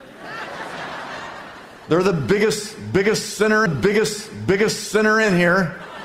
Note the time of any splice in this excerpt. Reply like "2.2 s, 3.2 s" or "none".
3.7 s